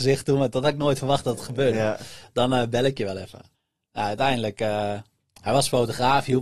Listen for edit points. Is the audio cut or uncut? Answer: cut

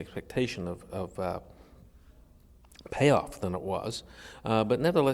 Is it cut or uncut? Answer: uncut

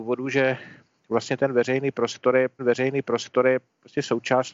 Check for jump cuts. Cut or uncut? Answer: cut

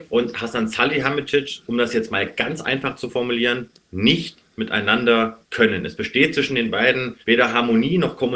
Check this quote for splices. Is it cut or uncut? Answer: cut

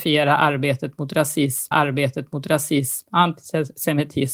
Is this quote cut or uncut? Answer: cut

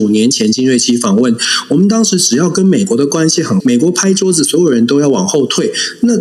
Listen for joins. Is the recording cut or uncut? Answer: cut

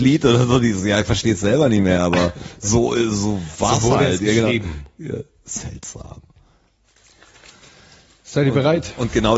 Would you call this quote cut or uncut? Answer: uncut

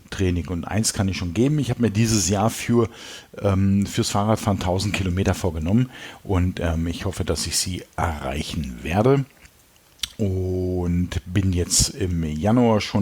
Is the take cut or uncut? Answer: uncut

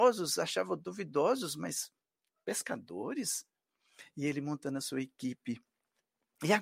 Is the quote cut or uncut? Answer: uncut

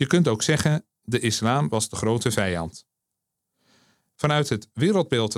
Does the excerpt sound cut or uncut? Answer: uncut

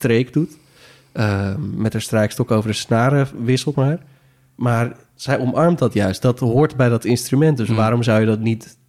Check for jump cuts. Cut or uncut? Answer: cut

